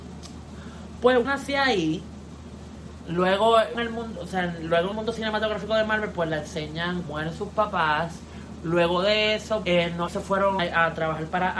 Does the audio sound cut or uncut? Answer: cut